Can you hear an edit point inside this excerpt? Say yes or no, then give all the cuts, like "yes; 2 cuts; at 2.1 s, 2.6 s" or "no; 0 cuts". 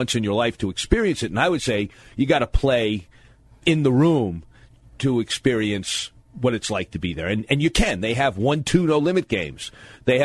no; 0 cuts